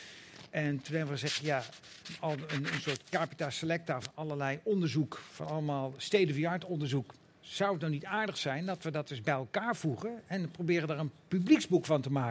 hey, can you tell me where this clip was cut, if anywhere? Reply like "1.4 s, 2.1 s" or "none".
none